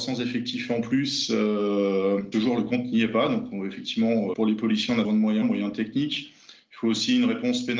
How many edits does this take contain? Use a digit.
4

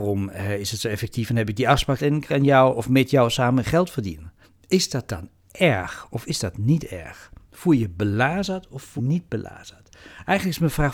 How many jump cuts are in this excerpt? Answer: 4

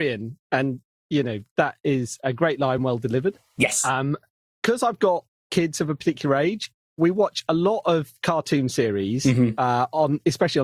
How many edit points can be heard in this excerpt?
0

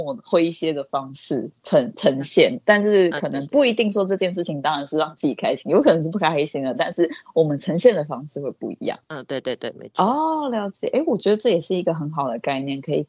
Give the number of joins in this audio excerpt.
1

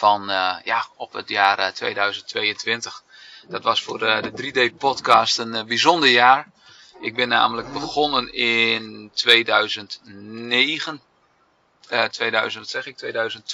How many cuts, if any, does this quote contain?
0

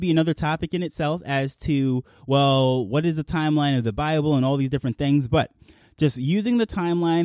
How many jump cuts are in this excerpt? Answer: 0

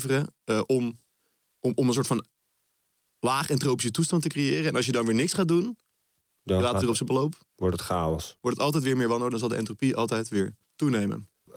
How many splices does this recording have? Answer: 0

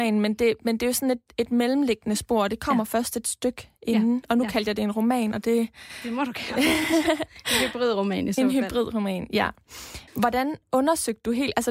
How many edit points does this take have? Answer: 1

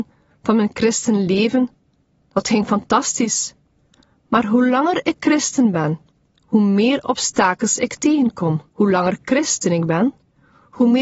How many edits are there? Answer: 1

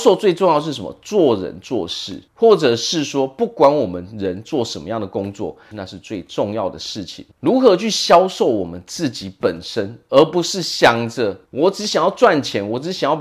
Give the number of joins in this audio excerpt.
4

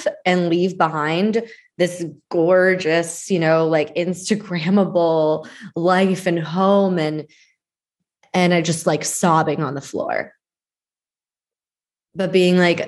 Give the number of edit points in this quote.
0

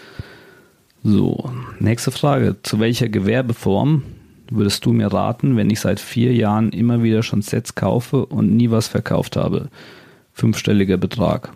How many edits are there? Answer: 0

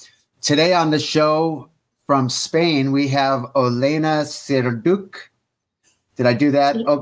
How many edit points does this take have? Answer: 0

